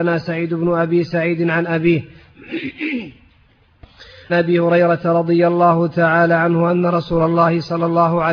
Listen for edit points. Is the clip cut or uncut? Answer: cut